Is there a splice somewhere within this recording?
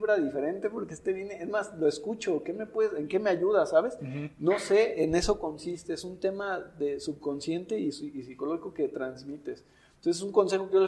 no; 0 cuts

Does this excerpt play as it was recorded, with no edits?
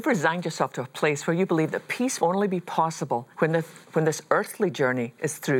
no; 3 cuts; at 2.2 s, 3.3 s, 3.8 s

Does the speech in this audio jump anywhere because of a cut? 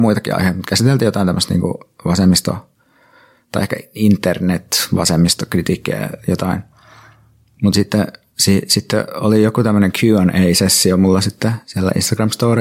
no; 0 cuts

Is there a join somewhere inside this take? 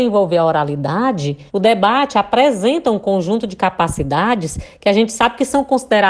yes; 1 cut; at 1.5 s

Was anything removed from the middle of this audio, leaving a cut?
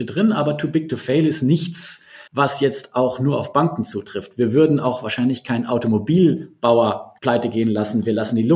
yes; 2 cuts; at 2.3 s, 7.2 s

